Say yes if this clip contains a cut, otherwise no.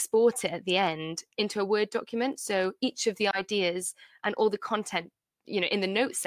no